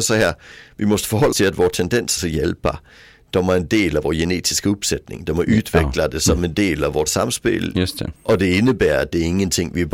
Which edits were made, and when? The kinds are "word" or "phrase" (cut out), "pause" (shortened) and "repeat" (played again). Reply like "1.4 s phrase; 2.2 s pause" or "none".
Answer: 1.3 s word; 2.2 s phrase; 7.1 s word; 8.2 s pause